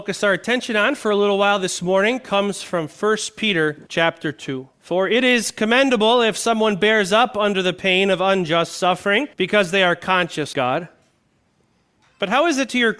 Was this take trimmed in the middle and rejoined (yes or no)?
yes